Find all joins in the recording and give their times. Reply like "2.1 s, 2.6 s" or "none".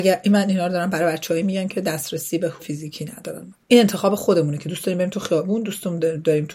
2.6 s, 3.5 s